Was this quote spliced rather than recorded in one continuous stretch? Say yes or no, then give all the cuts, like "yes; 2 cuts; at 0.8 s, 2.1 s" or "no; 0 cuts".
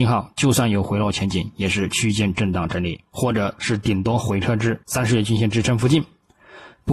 yes; 1 cut; at 4.8 s